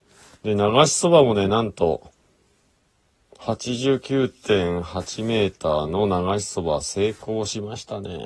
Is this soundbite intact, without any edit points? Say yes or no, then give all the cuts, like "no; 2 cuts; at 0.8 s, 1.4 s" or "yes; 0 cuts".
yes; 0 cuts